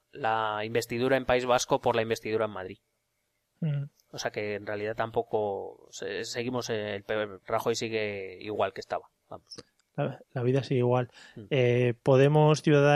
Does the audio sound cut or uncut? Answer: uncut